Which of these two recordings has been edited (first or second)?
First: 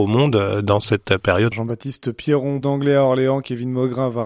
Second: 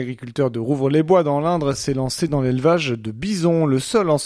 first